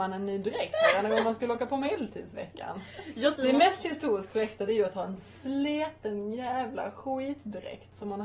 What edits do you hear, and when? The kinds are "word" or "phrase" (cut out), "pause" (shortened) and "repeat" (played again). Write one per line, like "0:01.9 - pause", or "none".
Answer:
0:03.4 - word